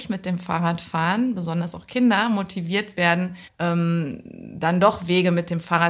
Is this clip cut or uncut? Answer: cut